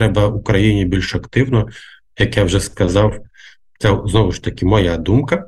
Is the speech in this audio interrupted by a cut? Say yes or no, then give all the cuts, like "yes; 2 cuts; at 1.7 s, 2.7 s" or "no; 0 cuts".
no; 0 cuts